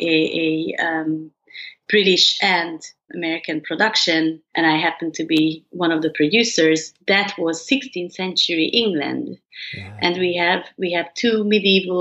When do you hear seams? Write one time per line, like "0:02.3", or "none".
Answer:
0:03.1